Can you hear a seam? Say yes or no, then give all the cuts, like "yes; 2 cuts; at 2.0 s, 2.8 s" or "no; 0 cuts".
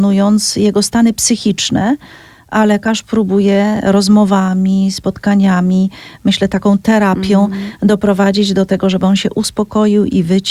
no; 0 cuts